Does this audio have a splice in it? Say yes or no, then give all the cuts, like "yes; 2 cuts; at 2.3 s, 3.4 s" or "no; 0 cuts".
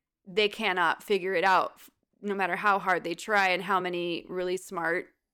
no; 0 cuts